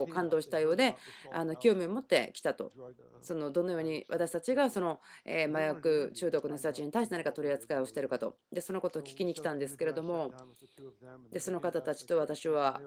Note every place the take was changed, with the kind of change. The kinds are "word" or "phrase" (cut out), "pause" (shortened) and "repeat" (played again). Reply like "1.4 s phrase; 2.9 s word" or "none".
3.0 s pause

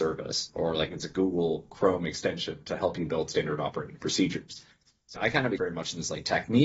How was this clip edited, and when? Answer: 5.1 s word; 5.6 s word

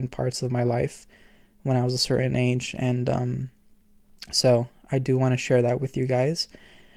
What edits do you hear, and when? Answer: none

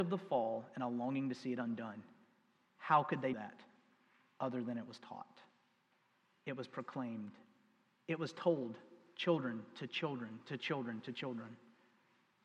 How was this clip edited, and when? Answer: 3.3 s word

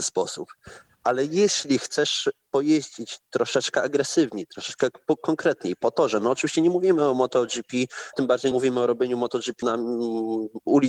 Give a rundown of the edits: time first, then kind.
8.1 s word; 8.5 s word; 9.6 s word

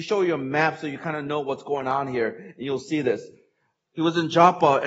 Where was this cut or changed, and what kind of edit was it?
none

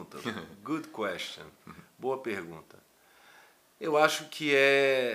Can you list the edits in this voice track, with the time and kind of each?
none

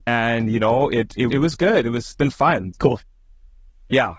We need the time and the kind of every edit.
1.3 s word; 2.1 s word; 2.7 s word

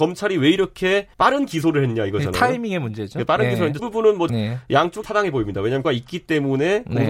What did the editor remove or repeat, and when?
1.1 s pause; 3.8 s phrase; 4.3 s phrase; 5.0 s word; 5.8 s word

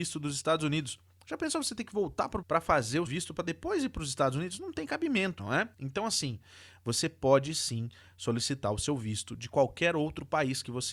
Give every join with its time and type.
2.4 s word; 3.1 s word; 5.4 s word; 5.7 s pause

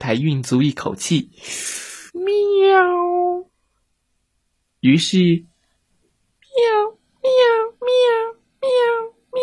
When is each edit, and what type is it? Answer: 2.1 s pause; 7.7 s pause

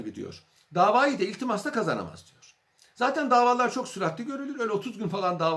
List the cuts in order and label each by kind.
none

